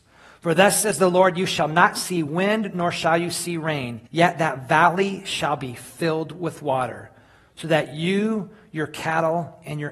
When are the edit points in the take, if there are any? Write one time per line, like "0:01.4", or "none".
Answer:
0:04.1

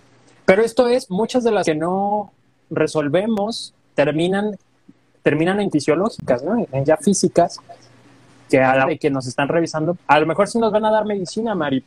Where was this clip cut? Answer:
0:01.1
0:01.6
0:03.9
0:05.7
0:06.9
0:08.5
0:08.8
0:10.0

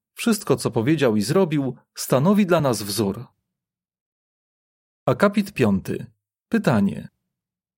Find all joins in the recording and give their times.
none

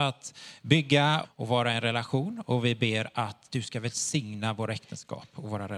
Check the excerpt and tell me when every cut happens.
0:01.2

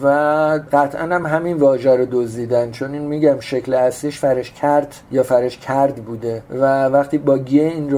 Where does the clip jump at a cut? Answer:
none

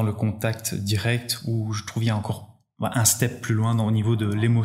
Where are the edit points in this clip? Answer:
none

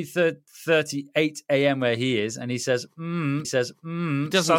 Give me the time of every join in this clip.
0:03.4

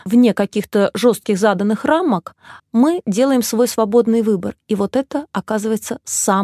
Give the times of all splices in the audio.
0:02.6

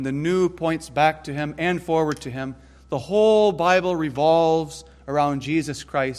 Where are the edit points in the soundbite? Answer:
none

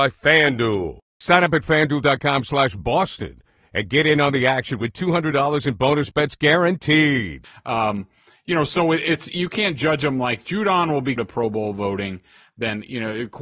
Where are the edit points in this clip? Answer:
0:11.2

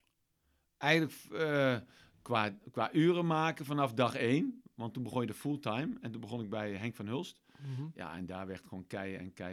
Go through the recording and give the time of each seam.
none

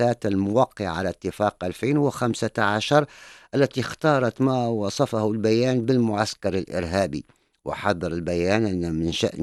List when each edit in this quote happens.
none

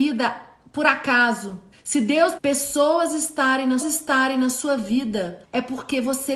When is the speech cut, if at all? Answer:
0:01.7
0:02.4
0:03.8
0:05.4

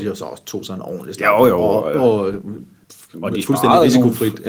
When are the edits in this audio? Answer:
none

